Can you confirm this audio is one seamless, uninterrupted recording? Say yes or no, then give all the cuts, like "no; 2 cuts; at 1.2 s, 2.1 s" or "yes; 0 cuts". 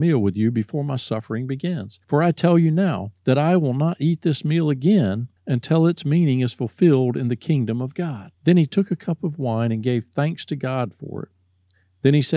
no; 4 cuts; at 2.0 s, 3.2 s, 5.4 s, 8.3 s